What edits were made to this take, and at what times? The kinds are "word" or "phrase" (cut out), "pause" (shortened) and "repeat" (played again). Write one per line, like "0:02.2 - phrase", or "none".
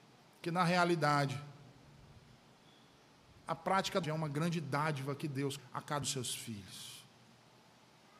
0:04.0 - word
0:05.6 - word
0:06.0 - word

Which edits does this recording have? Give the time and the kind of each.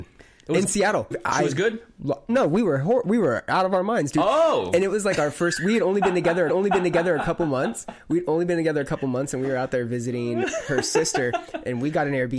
0:01.1 - word
0:02.3 - word
0:06.5 - repeat

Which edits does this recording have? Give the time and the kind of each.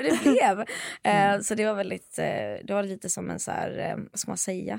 none

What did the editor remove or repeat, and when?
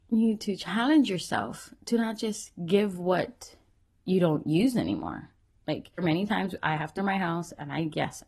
0:06.0 - word
0:07.0 - word

